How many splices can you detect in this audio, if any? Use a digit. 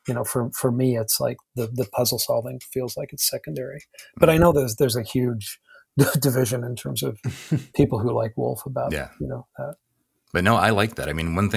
0